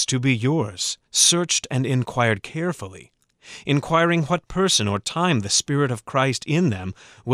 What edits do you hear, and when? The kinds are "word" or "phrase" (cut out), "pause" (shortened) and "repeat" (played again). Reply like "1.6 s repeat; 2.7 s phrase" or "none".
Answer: 1.1 s pause